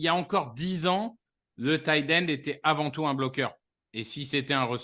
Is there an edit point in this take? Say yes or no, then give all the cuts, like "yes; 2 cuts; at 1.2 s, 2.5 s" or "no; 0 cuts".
no; 0 cuts